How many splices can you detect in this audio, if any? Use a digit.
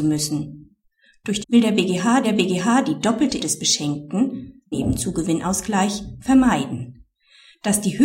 4